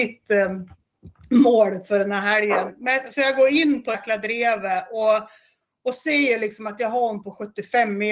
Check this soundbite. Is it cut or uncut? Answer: cut